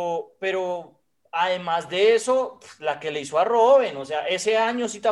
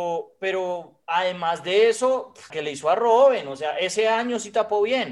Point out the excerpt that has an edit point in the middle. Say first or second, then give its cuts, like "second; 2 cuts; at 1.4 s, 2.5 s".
second; 2 cuts; at 1.0 s, 2.5 s